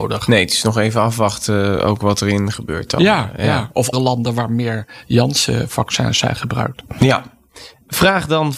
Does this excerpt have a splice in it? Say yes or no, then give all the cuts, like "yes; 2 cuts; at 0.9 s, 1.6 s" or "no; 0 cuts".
yes; 2 cuts; at 2.5 s, 3.9 s